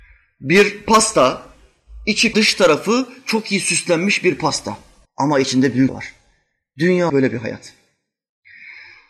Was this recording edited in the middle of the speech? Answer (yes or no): yes